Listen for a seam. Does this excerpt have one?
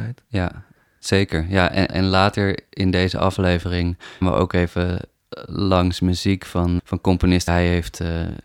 yes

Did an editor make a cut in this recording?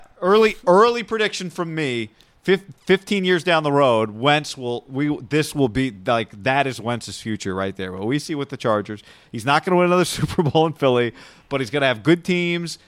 no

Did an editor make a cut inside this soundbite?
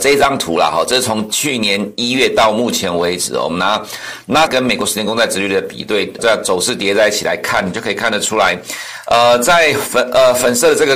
yes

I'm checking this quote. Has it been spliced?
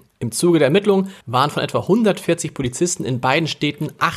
yes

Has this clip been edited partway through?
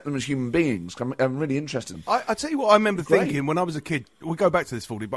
yes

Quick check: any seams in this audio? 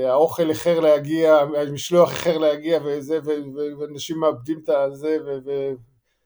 no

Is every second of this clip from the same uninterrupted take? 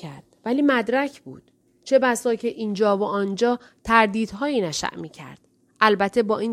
yes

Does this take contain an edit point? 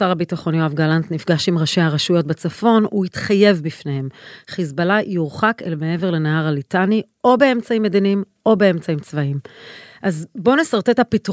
no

